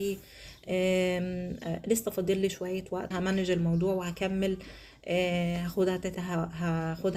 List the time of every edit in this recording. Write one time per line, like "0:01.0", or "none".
0:03.1
0:06.1